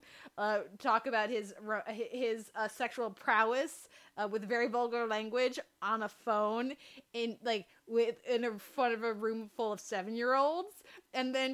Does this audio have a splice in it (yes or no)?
no